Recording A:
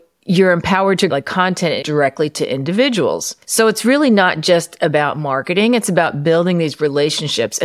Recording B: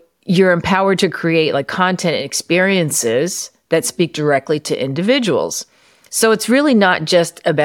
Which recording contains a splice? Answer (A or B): A